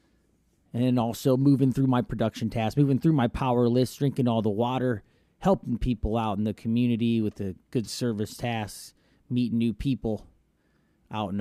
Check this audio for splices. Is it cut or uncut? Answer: uncut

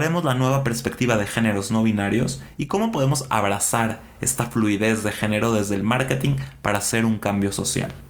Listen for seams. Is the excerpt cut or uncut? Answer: uncut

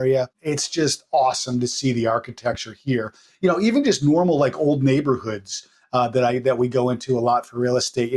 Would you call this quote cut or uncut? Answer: uncut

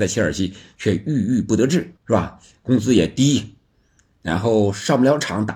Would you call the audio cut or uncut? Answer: cut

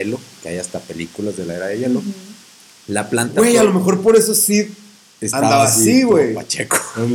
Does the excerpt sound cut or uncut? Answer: uncut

